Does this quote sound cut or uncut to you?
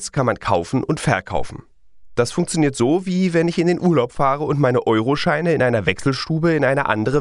uncut